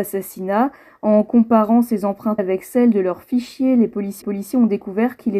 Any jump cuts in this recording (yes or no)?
yes